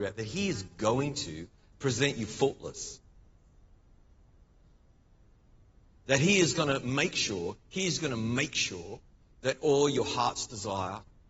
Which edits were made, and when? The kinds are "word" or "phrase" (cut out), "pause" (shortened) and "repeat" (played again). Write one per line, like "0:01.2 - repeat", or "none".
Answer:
none

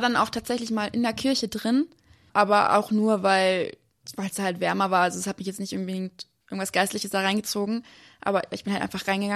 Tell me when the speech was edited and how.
none

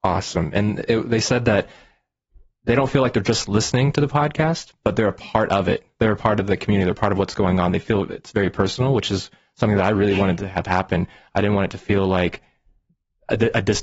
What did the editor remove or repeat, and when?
none

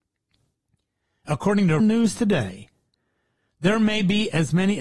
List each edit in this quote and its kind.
0:01.8 - word

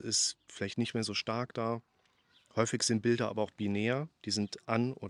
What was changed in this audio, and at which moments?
none

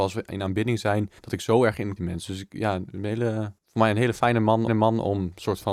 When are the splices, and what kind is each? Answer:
0:01.2 - pause
0:02.0 - phrase
0:03.6 - pause
0:04.7 - repeat

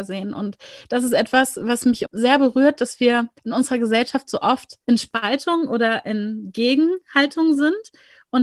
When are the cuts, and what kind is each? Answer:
0:02.0 - phrase
0:03.4 - pause
0:04.8 - pause

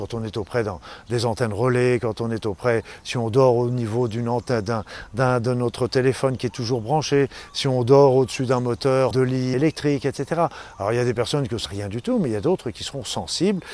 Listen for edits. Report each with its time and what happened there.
0:09.1 - word
0:09.5 - word
0:11.7 - phrase

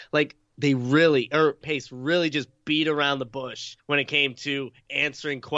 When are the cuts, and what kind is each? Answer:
0:01.6 - word
0:03.8 - pause

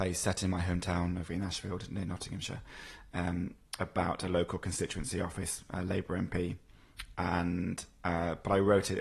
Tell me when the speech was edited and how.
0:01.3 - word

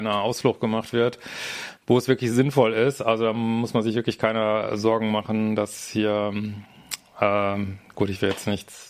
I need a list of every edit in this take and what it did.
0:01.8 - pause

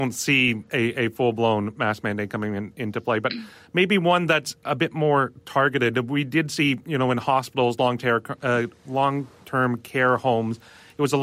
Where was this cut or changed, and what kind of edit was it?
none

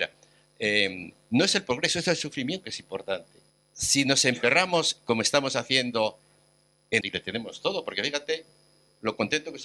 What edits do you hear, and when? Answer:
0:02.6 - word
0:03.5 - pause
0:07.0 - phrase

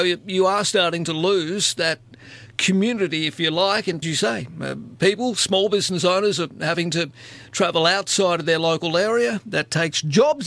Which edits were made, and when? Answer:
0:04.0 - word

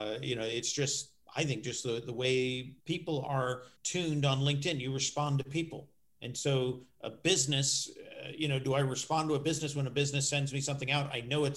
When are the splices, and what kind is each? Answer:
0:01.2 - pause
0:02.8 - pause
0:03.8 - pause
0:06.0 - pause

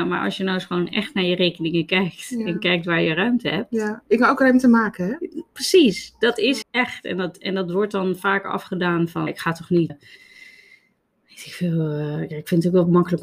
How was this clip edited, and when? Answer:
0:06.6 - word
0:09.3 - word
0:09.9 - word

